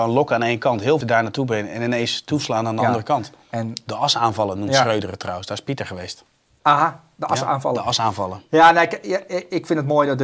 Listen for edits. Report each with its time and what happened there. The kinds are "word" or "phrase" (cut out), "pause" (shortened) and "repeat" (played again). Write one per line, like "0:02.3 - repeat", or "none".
0:01.0 - word